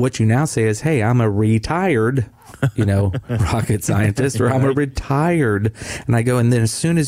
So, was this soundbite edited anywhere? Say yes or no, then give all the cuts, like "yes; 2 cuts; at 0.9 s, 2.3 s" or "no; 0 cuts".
no; 0 cuts